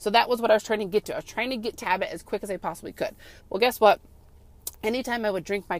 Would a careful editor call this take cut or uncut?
cut